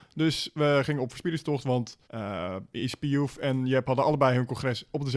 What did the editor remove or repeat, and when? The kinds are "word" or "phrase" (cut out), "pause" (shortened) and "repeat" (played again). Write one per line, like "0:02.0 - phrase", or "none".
0:02.0 - pause